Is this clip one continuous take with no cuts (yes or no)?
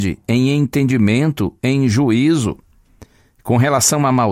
yes